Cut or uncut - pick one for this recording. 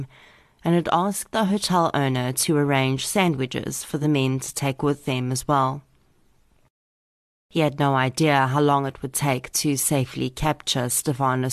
uncut